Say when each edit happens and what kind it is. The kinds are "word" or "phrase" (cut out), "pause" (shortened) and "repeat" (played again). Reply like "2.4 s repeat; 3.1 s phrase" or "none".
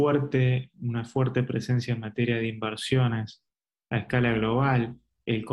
none